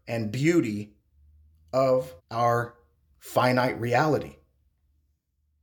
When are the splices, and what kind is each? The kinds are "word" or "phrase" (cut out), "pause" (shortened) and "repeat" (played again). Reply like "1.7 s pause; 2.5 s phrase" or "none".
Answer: 2.2 s pause